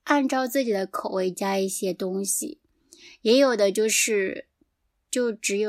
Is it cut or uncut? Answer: uncut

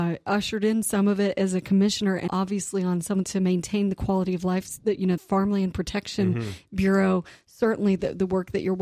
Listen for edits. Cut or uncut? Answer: cut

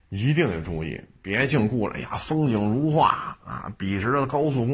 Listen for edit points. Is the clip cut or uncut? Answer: uncut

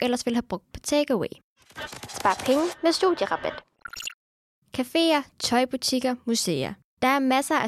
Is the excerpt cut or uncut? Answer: uncut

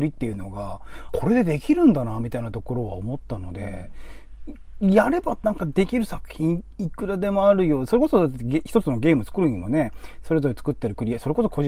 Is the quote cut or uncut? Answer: cut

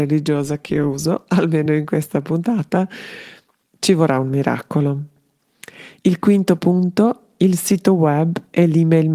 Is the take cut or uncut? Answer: uncut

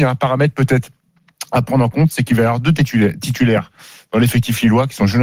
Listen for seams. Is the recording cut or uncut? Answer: uncut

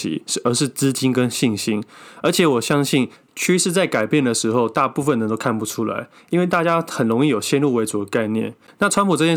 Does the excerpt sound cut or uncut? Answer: uncut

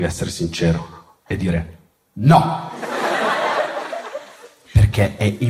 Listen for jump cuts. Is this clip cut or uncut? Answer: uncut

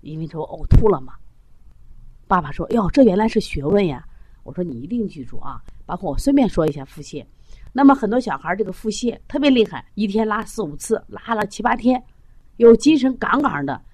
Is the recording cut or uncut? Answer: cut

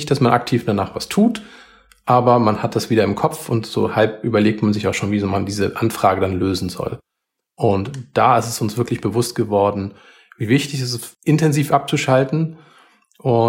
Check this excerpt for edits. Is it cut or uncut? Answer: uncut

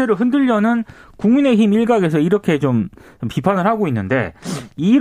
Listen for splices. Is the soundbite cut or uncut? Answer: uncut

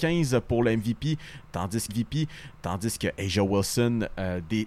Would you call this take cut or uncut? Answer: cut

